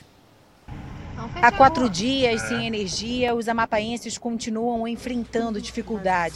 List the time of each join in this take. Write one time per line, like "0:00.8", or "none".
none